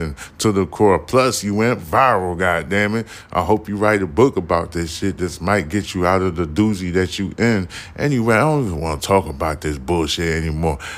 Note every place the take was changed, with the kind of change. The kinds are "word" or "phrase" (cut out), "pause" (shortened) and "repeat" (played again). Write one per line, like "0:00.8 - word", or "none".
none